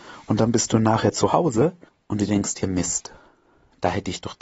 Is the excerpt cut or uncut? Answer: cut